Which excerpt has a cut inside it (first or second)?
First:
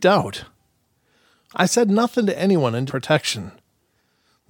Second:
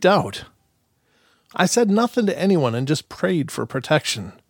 first